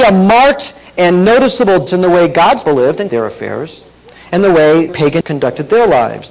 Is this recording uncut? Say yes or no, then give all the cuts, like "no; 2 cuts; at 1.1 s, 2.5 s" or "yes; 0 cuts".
no; 5 cuts; at 1.9 s, 2.7 s, 3.1 s, 4.9 s, 5.2 s